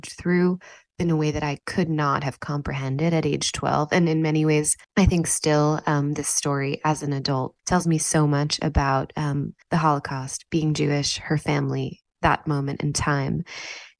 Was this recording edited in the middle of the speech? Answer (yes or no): yes